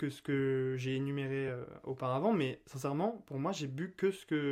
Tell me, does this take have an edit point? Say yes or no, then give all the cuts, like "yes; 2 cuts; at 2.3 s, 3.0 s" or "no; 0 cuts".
no; 0 cuts